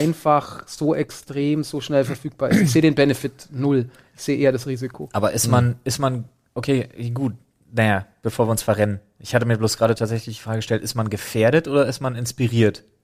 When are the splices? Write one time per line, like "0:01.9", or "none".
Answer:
none